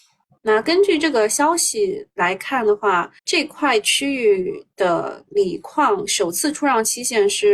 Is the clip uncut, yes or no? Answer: no